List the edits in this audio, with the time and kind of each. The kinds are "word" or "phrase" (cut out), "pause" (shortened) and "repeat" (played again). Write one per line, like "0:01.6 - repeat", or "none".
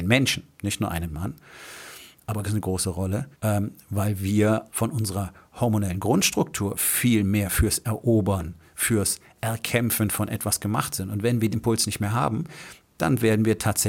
0:02.4 - phrase
0:03.3 - pause
0:04.7 - word
0:11.5 - word